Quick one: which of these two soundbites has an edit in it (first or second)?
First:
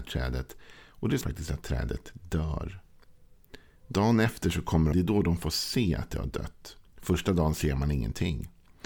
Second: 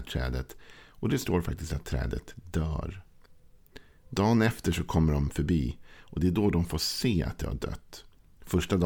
first